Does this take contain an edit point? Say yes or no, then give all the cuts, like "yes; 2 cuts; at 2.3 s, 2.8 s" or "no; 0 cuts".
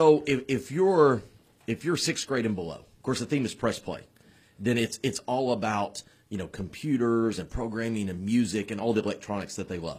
no; 0 cuts